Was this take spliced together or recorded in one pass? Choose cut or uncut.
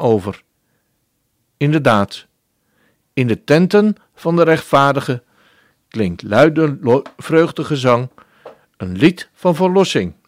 uncut